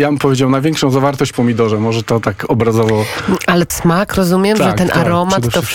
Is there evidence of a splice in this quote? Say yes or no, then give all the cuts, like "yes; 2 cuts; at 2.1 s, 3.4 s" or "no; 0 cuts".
yes; 2 cuts; at 1.3 s, 3.7 s